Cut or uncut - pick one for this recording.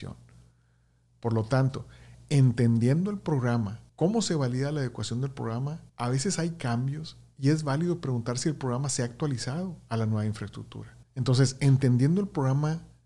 cut